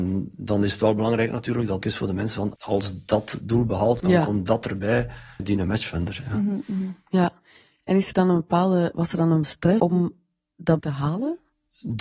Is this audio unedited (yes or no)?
no